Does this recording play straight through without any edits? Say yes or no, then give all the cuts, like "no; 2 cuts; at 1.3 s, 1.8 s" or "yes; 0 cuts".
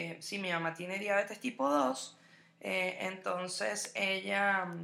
yes; 0 cuts